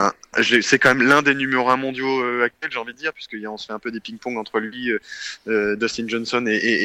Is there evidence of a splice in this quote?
no; 0 cuts

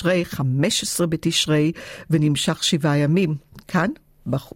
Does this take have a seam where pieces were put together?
no; 0 cuts

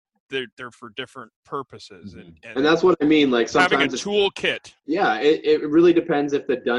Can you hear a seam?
yes; 2 cuts; at 1.4 s, 4.8 s

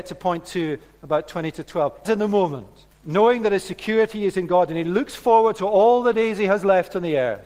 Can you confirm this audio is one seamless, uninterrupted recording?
no; 2 cuts; at 2.1 s, 2.9 s

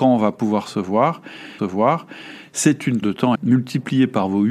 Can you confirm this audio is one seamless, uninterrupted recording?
no; 3 cuts; at 1.6 s, 3.0 s, 3.3 s

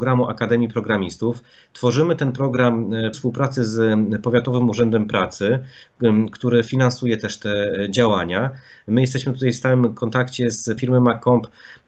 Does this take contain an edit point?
yes; 2 cuts; at 3.1 s, 10.8 s

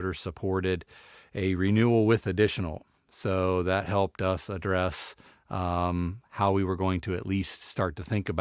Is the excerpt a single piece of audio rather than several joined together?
yes; 0 cuts

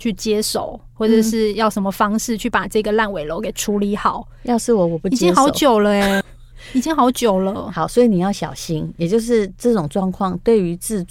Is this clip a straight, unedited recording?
no; 1 cut; at 6.2 s

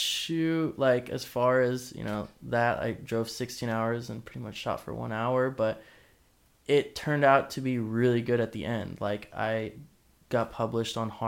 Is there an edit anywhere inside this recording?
no; 0 cuts

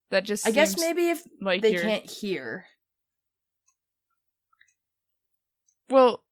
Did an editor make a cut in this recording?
no; 0 cuts

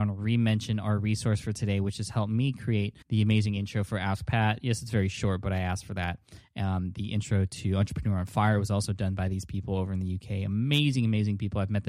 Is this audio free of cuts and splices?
no; 1 cut; at 3.0 s

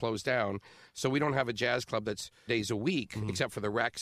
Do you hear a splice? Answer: yes; 1 cut; at 2.5 s

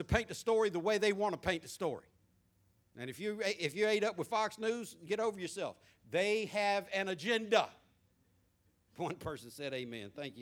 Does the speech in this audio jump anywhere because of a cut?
no; 0 cuts

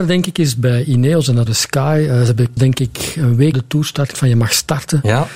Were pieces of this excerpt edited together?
yes; 4 cuts; at 1.5 s, 2.6 s, 3.5 s, 4.1 s

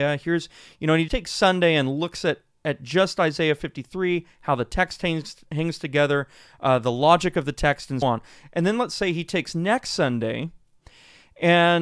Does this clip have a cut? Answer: yes; 2 cuts; at 1.1 s, 8.0 s

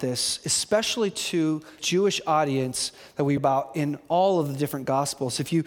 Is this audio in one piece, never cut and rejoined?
no; 2 cuts; at 1.8 s, 3.4 s

